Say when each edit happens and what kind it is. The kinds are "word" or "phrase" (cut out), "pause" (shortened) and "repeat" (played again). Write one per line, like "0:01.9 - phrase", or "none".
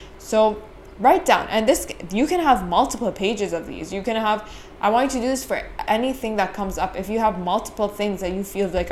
0:05.9 - word